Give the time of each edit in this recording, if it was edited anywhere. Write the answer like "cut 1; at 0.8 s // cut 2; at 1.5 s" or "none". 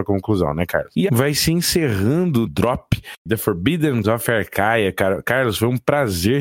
cut 1; at 1.1 s // cut 2; at 2.5 s // cut 3; at 4.0 s